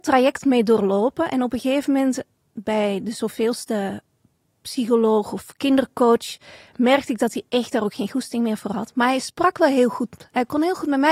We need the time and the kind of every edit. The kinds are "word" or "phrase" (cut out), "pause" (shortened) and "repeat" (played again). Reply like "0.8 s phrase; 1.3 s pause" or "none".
2.4 s word

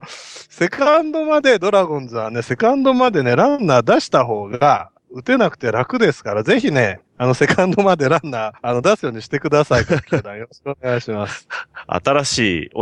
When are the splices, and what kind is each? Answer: 5.0 s pause; 7.1 s pause; 8.6 s pause

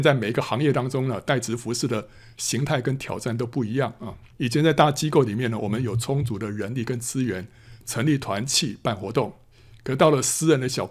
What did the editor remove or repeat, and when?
4.3 s pause

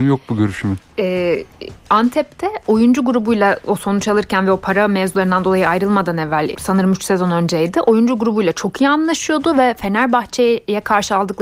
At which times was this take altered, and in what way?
6.5 s word

